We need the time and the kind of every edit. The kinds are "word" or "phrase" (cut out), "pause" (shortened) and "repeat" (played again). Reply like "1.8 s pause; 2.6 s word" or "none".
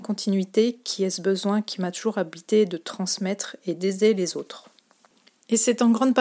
none